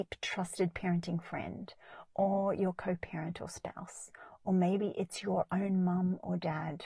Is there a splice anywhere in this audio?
no; 0 cuts

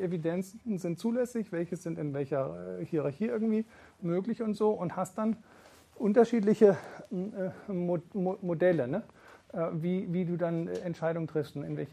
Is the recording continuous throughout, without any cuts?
yes; 0 cuts

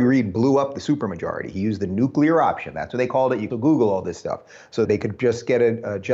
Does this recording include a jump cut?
yes; 2 cuts; at 3.5 s, 4.8 s

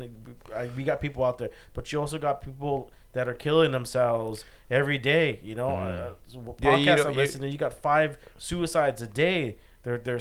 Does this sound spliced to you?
no; 0 cuts

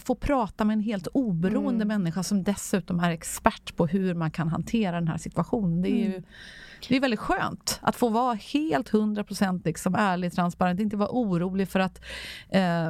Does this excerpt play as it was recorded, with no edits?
yes; 0 cuts

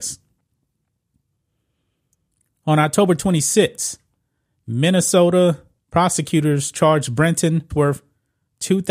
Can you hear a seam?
yes; 2 cuts; at 5.8 s, 7.7 s

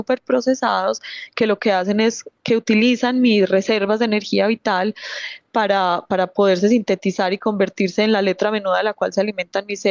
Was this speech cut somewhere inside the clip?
no; 0 cuts

